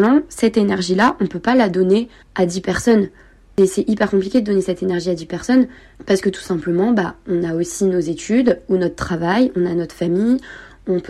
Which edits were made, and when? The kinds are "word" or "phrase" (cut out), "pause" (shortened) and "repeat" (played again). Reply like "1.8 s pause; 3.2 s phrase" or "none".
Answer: none